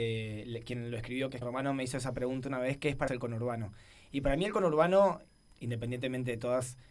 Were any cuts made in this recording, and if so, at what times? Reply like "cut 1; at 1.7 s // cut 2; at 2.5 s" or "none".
cut 1; at 1.4 s // cut 2; at 3.1 s